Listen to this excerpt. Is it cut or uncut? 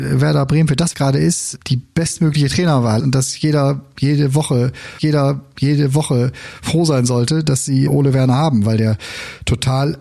cut